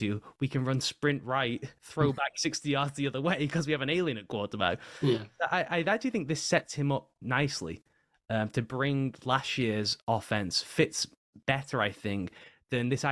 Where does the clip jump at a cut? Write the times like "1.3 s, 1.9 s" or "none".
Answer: none